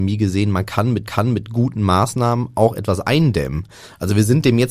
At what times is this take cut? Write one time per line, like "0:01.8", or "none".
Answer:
0:01.1